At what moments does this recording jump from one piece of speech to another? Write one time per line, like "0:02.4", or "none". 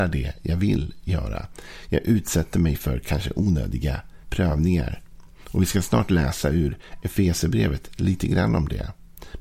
0:04.2